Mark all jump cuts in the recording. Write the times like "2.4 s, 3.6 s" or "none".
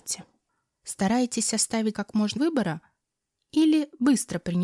1.9 s, 2.4 s